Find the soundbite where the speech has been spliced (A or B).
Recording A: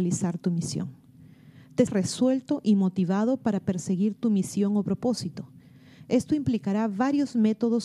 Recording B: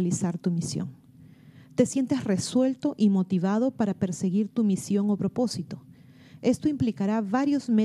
A